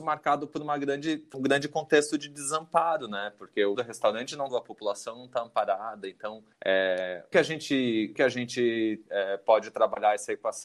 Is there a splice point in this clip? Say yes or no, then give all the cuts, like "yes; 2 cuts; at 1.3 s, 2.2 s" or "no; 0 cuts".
yes; 6 cuts; at 1.3 s, 3.7 s, 4.5 s, 6.5 s, 7.3 s, 8.2 s